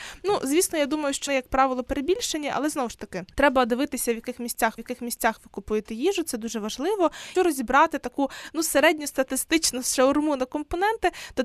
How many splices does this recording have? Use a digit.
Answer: 4